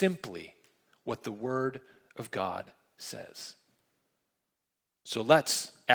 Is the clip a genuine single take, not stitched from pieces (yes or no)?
yes